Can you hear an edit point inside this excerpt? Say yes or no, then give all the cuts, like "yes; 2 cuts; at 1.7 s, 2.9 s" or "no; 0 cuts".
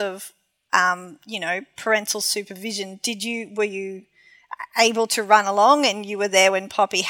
no; 0 cuts